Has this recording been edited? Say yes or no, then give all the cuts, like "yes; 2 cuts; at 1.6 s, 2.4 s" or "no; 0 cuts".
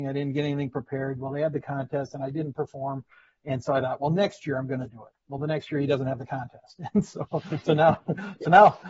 no; 0 cuts